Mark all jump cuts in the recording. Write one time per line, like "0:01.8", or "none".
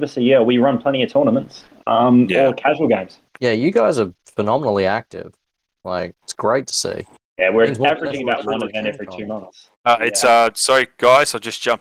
0:03.3
0:06.2
0:07.2
0:09.8